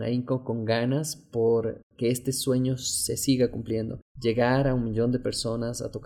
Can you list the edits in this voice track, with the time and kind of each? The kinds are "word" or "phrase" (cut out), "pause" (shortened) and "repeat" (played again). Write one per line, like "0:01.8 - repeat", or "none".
0:04.1 - pause